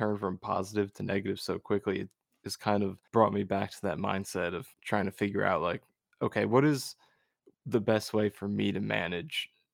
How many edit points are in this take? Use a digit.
2